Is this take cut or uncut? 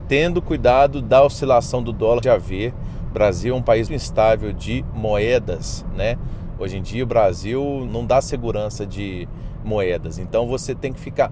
cut